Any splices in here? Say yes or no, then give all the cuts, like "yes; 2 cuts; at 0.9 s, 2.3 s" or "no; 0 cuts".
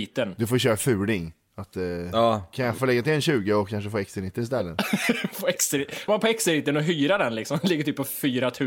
yes; 2 cuts; at 2.8 s, 6.1 s